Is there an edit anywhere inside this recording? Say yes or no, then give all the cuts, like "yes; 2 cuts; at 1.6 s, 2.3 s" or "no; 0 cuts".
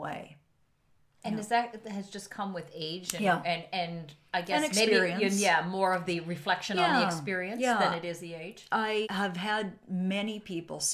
yes; 1 cut; at 9.0 s